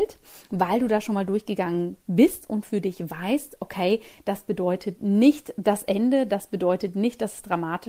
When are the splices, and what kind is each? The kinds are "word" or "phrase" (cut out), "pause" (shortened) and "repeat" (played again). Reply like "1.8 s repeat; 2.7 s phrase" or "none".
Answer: none